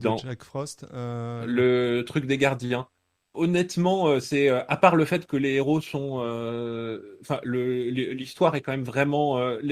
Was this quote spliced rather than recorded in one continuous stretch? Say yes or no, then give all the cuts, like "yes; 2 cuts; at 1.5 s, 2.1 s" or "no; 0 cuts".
yes; 1 cut; at 3.1 s